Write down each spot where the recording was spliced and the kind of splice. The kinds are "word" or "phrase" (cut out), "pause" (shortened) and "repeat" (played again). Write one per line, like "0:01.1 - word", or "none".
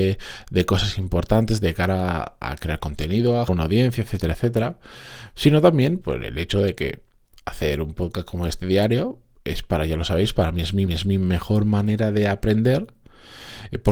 0:03.5 - word
0:06.0 - word
0:09.4 - pause
0:10.9 - repeat